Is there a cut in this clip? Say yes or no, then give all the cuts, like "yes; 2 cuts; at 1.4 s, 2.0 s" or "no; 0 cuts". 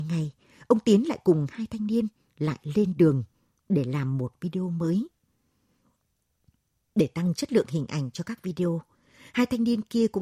no; 0 cuts